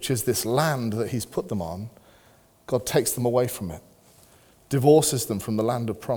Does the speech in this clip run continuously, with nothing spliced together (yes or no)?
yes